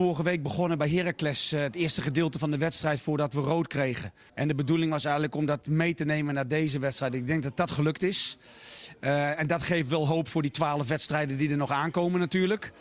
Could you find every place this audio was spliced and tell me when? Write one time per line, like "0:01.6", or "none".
0:04.3